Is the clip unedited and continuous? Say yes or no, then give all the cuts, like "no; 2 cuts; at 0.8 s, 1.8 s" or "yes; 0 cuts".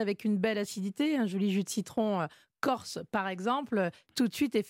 yes; 0 cuts